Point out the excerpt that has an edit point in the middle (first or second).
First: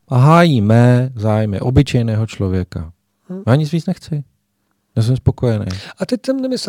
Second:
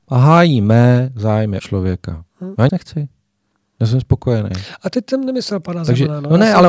second